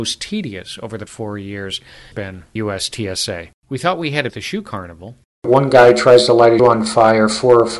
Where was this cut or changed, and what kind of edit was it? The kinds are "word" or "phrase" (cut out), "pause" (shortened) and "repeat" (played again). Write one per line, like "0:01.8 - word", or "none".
0:01.1 - word
0:02.1 - word
0:02.6 - word
0:03.6 - pause
0:04.3 - phrase
0:06.6 - word

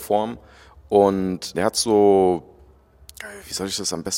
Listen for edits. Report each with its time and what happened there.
0:01.5 - word

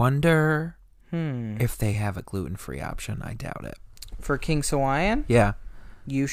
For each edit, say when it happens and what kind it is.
none

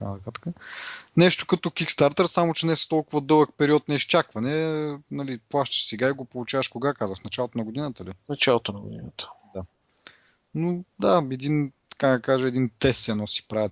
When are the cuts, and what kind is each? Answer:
none

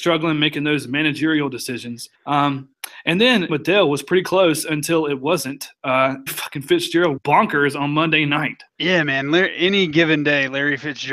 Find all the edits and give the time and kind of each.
0:02.1 - pause
0:03.5 - phrase
0:06.3 - phrase
0:07.2 - word
0:08.7 - pause

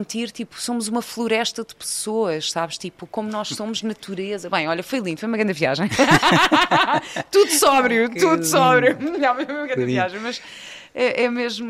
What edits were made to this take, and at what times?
none

